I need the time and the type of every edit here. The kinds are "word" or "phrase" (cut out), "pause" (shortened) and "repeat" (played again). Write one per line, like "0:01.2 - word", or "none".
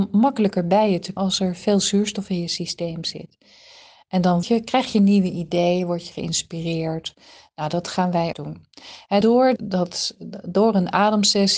0:01.2 - word
0:04.4 - word
0:08.3 - word
0:09.2 - word
0:09.6 - word